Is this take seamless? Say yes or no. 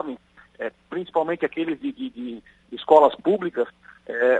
yes